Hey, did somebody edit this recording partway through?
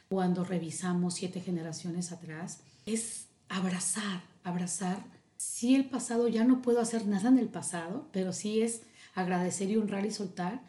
no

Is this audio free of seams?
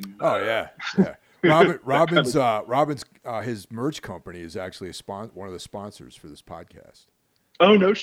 yes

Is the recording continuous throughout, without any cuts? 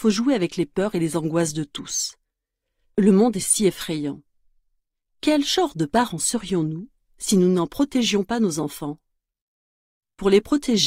yes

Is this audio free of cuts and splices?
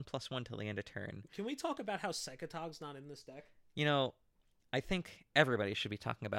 yes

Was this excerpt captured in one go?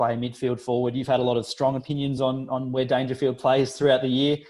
yes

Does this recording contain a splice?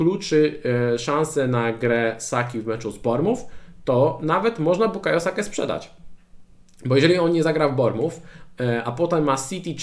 no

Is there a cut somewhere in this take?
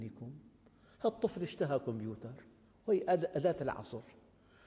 no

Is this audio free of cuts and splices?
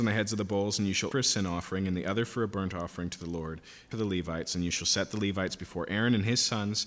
no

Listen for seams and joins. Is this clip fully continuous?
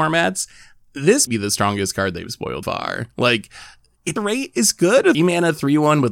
no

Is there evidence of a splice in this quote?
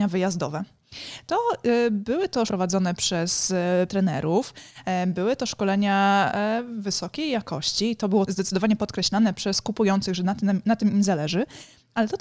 yes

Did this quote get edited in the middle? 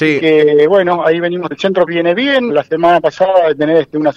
yes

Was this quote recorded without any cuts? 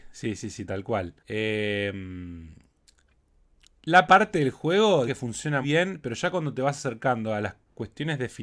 no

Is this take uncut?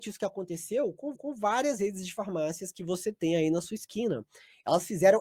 no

